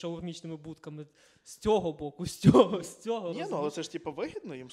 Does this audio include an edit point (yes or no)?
no